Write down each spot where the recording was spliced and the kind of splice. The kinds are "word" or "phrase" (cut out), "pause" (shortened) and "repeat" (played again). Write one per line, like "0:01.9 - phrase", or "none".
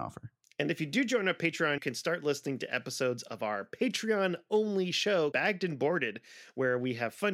0:01.8 - word
0:05.3 - word